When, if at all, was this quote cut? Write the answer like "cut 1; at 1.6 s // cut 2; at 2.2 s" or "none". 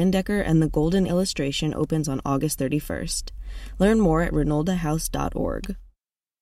cut 1; at 1.1 s